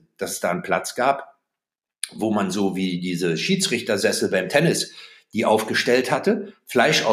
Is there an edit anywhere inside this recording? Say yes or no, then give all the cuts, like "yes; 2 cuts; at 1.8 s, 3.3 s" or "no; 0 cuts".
no; 0 cuts